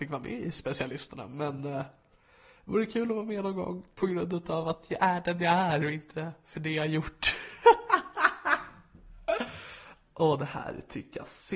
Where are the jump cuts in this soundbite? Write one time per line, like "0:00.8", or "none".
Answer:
none